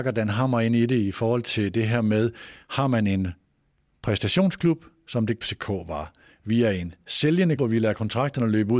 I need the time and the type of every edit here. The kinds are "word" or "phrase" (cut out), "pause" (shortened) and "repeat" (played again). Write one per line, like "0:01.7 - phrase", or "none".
0:05.4 - word
0:07.6 - word